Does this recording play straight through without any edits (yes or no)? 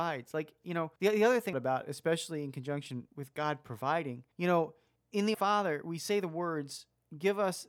no